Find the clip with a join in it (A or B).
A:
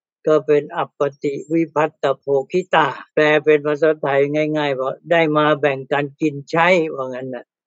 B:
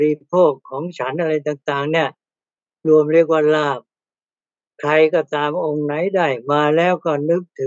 A